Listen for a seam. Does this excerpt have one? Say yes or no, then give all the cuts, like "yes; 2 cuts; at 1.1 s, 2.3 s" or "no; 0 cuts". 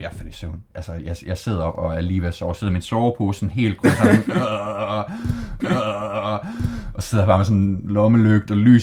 yes; 1 cut; at 5.6 s